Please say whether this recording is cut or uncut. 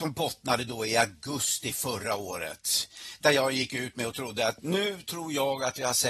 uncut